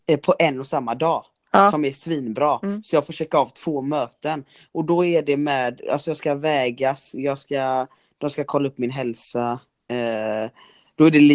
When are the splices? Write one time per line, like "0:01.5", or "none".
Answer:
none

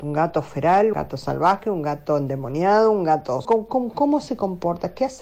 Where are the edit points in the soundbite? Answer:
0:00.9
0:03.4

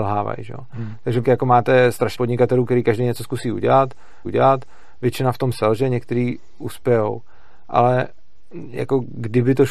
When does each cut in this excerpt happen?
0:01.2
0:02.1
0:04.2

